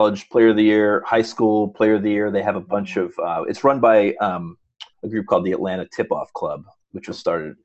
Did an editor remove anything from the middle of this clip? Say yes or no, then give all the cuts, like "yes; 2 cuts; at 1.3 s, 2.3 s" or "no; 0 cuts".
yes; 1 cut; at 4.9 s